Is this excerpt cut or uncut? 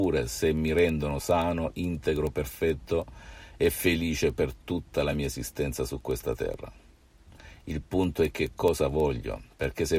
uncut